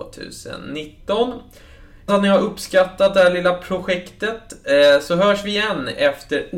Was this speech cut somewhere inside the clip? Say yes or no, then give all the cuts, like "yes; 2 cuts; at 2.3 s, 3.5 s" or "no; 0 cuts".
yes; 1 cut; at 2.1 s